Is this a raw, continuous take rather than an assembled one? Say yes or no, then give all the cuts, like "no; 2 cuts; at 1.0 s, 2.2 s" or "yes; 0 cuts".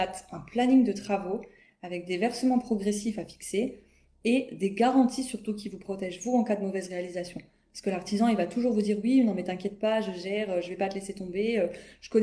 yes; 0 cuts